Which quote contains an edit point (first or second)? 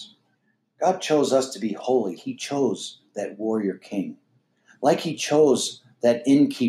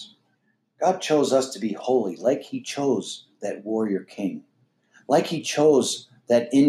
first